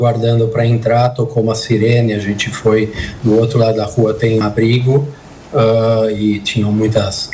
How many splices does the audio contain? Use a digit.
1